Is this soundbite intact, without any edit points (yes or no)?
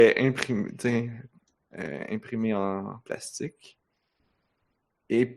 yes